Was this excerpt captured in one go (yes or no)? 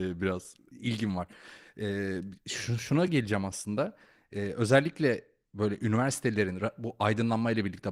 yes